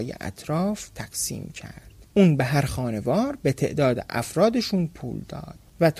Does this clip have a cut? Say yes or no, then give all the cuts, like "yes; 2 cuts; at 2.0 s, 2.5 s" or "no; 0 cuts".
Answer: no; 0 cuts